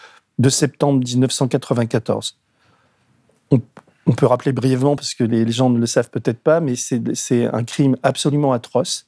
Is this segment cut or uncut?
uncut